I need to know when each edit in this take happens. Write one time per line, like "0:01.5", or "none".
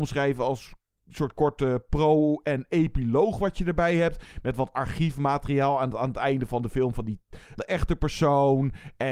0:07.6